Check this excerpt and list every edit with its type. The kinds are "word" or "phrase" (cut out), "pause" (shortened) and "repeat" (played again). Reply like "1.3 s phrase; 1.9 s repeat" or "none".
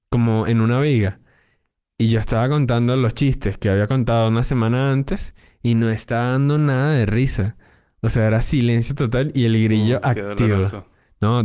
none